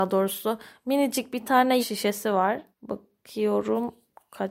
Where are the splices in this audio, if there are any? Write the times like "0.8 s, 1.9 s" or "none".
1.8 s, 2.7 s

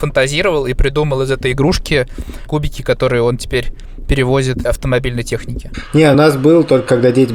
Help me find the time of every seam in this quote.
2.5 s, 4.7 s, 6.1 s

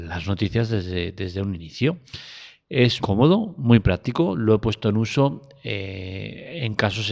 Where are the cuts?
3.0 s

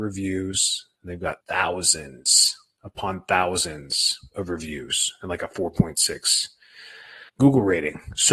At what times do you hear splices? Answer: 1.4 s, 7.3 s

